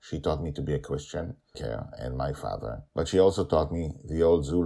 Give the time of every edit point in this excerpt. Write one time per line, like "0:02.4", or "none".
0:01.5
0:02.9